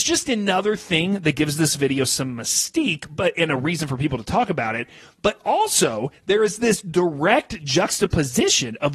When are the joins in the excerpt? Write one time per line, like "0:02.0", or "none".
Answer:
none